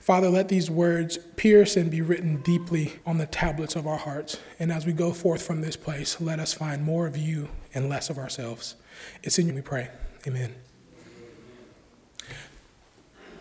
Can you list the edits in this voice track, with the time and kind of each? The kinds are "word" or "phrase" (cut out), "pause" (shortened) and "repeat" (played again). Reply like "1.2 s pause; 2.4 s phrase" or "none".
3.0 s pause; 9.5 s phrase